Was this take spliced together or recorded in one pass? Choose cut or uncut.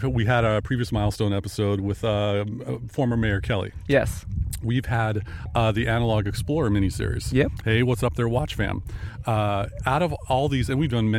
uncut